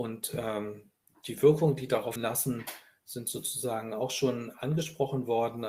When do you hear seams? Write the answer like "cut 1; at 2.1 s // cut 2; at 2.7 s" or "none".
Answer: cut 1; at 2.2 s